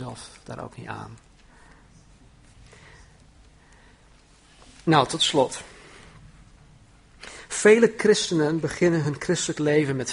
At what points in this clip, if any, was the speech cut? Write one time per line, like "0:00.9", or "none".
none